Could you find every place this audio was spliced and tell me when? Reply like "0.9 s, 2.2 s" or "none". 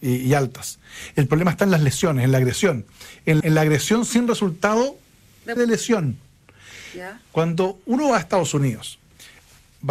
3.4 s, 5.6 s